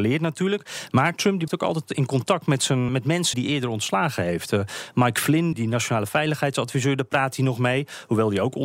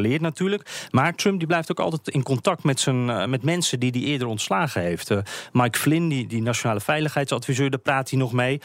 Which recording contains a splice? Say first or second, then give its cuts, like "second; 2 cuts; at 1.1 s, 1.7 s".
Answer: first; 4 cuts; at 1.5 s, 2.9 s, 3.3 s, 5.5 s